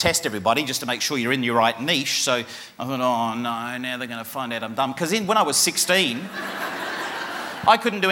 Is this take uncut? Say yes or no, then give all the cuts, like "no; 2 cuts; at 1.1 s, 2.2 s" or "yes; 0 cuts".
yes; 0 cuts